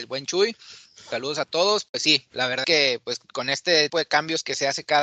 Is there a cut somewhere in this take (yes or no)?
yes